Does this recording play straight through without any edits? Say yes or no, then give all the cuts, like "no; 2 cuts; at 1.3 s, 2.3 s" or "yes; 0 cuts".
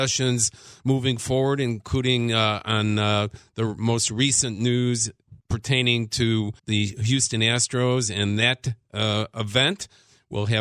no; 2 cuts; at 5.4 s, 6.6 s